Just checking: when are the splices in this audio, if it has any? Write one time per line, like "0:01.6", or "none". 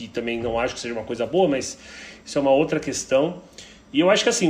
none